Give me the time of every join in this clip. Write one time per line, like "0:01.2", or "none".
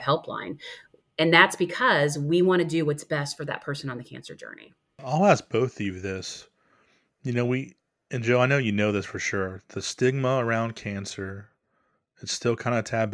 none